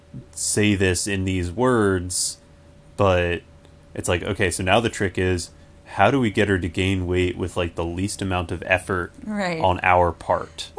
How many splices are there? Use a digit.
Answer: 0